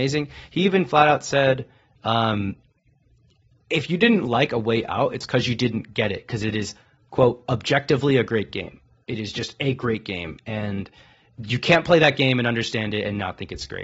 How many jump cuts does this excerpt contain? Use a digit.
0